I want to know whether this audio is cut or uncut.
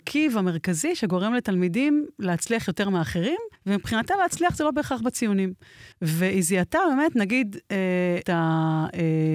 cut